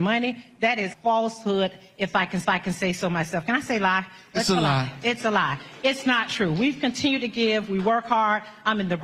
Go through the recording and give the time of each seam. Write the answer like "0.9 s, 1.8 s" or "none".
0.9 s, 2.4 s